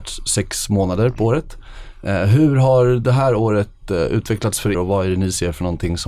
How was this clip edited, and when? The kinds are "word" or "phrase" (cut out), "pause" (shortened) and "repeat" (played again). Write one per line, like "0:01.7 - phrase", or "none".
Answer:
0:04.7 - word